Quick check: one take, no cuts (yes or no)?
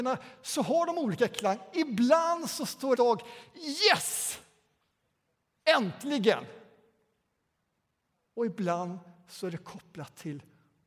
no